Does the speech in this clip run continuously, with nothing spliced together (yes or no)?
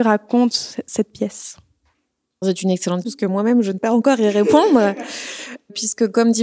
no